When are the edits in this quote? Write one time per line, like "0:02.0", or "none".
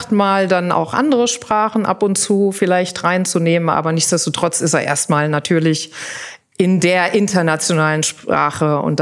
none